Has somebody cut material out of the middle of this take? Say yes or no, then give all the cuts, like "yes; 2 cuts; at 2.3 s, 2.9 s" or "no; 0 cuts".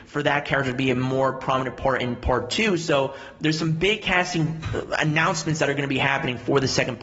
no; 0 cuts